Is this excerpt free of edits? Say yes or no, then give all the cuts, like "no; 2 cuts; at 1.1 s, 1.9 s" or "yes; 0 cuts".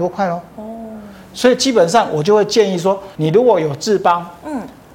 no; 1 cut; at 3.2 s